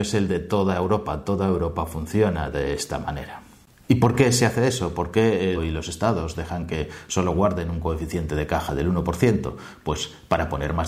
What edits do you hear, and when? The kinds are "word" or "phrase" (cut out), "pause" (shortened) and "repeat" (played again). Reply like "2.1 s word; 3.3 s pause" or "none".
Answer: 5.6 s phrase